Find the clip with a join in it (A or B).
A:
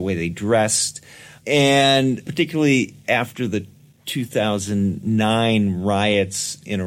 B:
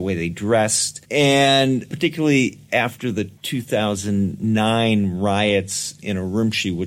B